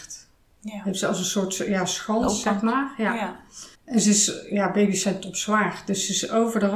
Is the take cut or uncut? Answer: cut